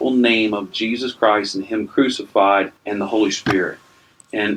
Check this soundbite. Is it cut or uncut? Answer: cut